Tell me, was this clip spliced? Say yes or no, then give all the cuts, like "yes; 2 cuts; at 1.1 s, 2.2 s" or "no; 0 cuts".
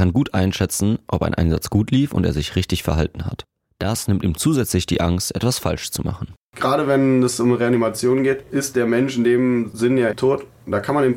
no; 0 cuts